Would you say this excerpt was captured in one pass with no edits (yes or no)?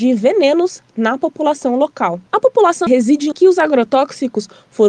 no